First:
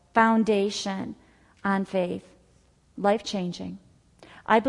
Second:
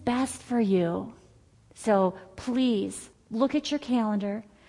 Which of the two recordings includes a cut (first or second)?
second